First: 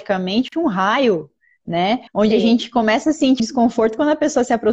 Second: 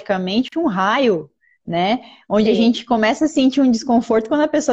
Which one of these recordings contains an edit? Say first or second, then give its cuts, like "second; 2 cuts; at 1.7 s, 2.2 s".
first; 2 cuts; at 2.1 s, 3.4 s